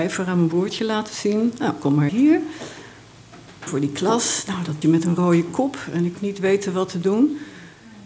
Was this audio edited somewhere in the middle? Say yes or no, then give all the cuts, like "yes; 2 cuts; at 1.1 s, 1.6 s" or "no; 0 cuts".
yes; 4 cuts; at 2.1 s, 3.7 s, 4.8 s, 6.1 s